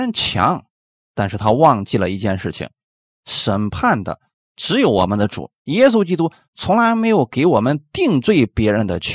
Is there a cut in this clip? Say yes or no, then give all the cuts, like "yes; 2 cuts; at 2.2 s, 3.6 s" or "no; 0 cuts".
no; 0 cuts